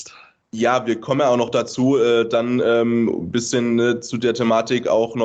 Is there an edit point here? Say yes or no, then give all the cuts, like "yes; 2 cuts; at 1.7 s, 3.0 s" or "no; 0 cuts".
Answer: no; 0 cuts